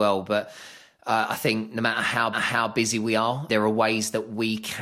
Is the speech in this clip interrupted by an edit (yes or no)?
yes